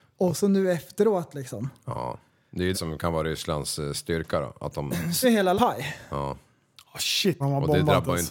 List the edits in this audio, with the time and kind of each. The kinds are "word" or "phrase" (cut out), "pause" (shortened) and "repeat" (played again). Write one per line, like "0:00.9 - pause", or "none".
0:02.7 - word
0:05.2 - word
0:05.6 - word
0:07.4 - word